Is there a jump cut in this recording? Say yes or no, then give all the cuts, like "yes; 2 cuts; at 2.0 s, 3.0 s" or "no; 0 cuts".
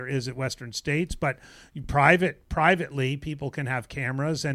no; 0 cuts